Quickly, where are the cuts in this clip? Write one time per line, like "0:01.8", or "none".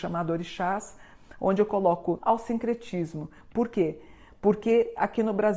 0:02.2